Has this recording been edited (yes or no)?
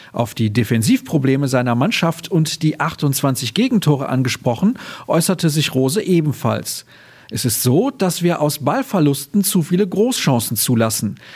no